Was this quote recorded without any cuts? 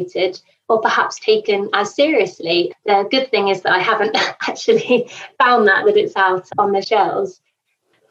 no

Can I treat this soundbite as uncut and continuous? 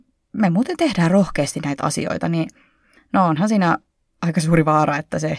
yes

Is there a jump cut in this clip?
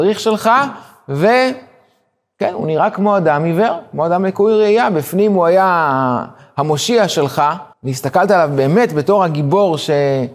yes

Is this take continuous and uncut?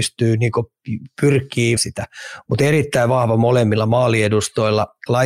no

